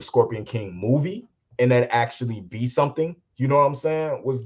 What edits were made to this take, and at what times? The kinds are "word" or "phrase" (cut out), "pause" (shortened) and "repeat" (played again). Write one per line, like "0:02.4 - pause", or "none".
0:01.3 - pause
0:03.2 - pause